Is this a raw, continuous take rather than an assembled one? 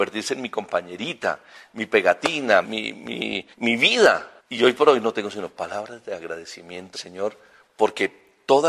no; 4 cuts; at 2.6 s, 3.5 s, 4.4 s, 6.9 s

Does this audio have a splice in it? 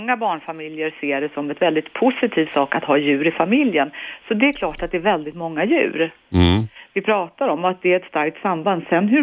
no; 0 cuts

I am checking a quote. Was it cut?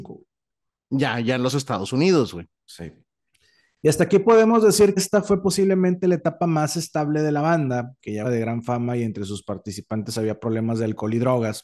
yes; 3 cuts; at 3.3 s, 5.0 s, 8.2 s

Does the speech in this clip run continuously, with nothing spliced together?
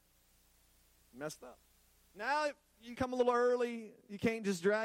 no; 2 cuts; at 1.7 s, 2.9 s

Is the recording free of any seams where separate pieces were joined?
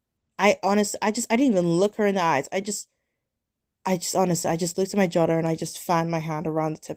yes; 0 cuts

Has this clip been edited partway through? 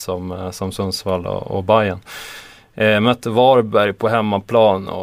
no; 0 cuts

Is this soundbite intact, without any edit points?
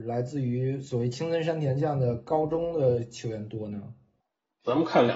yes; 0 cuts

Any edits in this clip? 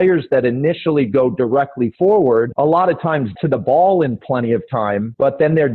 yes; 1 cut; at 3.4 s

